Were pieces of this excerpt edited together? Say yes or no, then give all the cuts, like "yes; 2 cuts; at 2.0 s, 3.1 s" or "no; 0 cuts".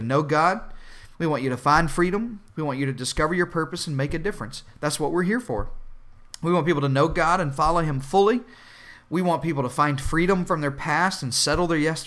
yes; 1 cut; at 2.5 s